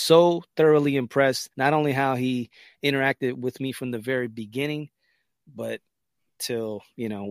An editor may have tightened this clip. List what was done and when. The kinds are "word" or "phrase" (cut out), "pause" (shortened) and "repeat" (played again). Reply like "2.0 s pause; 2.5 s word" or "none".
1.5 s pause